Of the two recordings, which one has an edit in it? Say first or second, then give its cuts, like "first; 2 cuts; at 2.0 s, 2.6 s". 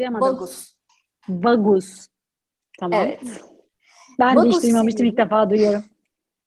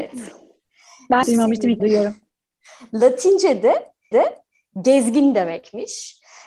second; 4 cuts; at 1.2 s, 1.8 s, 2.3 s, 4.1 s